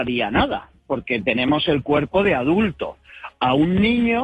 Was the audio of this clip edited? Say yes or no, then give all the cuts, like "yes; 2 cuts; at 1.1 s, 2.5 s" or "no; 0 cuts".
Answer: no; 0 cuts